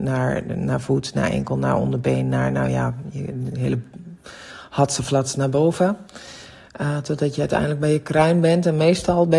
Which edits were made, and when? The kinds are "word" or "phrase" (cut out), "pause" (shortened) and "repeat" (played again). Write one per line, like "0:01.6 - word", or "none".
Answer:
none